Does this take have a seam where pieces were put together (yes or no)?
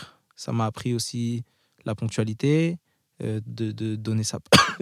no